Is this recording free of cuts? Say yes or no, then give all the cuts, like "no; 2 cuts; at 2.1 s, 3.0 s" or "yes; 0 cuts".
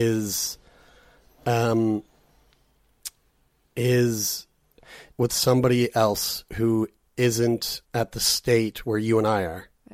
no; 2 cuts; at 5.1 s, 7.9 s